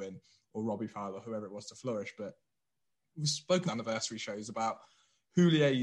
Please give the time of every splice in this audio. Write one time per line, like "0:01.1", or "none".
0:03.7